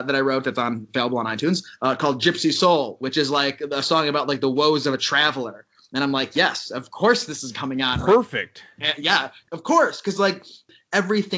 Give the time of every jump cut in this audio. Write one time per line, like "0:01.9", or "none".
none